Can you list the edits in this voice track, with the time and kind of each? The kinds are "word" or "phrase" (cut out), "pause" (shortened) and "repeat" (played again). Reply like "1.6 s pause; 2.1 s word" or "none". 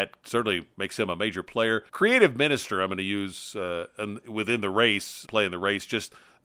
1.9 s pause; 5.3 s word

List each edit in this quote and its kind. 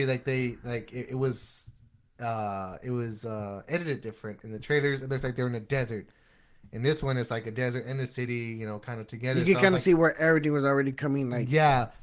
none

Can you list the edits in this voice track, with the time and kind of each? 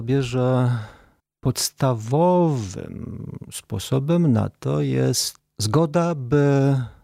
none

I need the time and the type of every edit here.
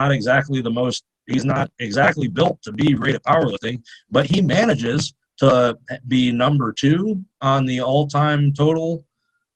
3.0 s word

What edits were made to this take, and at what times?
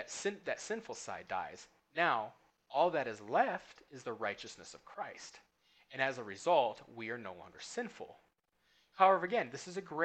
none

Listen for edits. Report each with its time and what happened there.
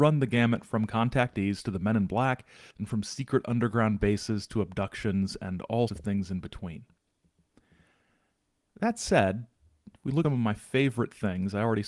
2.7 s pause; 5.9 s word; 10.2 s word

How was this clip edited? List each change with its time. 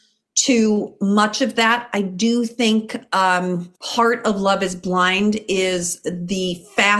3.8 s pause

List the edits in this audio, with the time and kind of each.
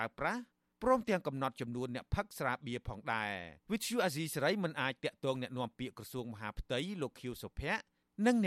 3.6 s pause

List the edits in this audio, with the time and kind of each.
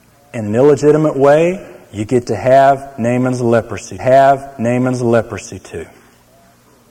4.0 s repeat

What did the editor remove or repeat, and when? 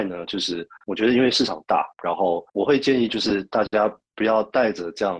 1.9 s pause; 2.5 s pause

